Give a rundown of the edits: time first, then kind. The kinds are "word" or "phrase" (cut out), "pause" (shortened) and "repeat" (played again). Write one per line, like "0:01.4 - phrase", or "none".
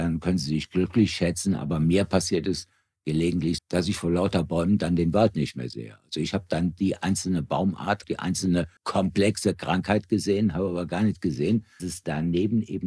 0:03.6 - word
0:08.0 - word
0:08.8 - pause
0:11.8 - word